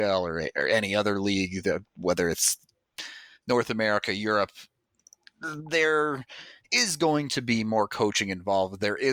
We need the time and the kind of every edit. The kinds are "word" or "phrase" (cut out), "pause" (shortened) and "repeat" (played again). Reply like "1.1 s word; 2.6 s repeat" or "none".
none